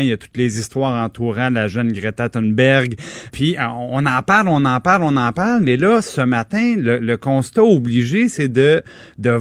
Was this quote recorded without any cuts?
no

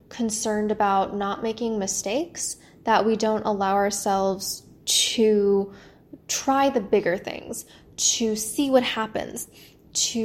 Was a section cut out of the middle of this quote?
no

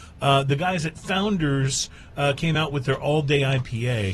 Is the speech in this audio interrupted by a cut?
no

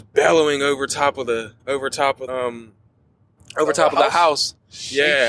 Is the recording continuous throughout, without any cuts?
no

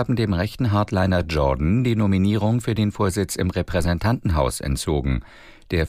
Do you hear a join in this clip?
no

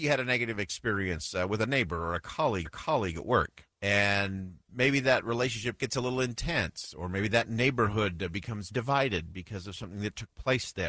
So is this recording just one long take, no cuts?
no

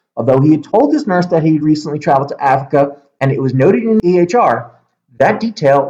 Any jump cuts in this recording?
no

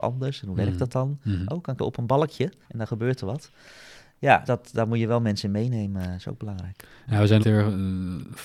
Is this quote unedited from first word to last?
no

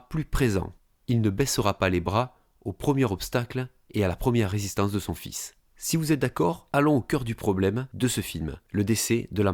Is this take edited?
no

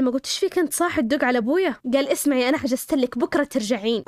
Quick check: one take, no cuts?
yes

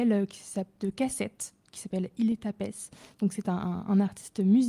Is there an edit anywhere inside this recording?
no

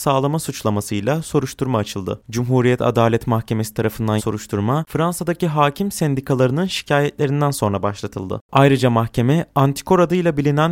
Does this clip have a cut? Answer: yes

